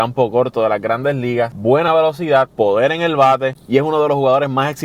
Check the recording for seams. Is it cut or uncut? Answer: uncut